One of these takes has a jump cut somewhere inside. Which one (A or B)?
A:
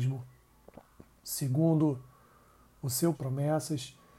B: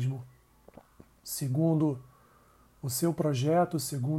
A